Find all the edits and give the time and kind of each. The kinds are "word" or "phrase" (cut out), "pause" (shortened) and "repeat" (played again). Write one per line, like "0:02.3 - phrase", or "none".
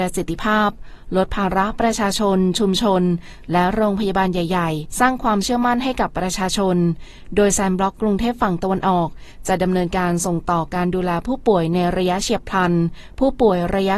0:04.9 - word